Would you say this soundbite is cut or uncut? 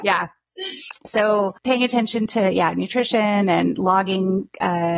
uncut